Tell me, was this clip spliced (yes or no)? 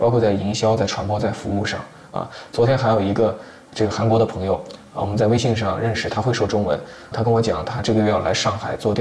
yes